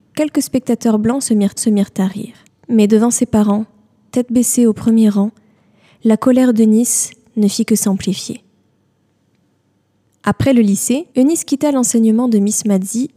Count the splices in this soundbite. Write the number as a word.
three